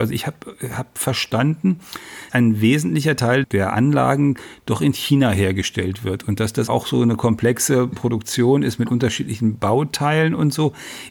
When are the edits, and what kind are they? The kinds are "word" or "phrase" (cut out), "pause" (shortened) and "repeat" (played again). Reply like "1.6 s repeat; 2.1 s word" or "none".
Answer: 2.3 s word; 6.7 s word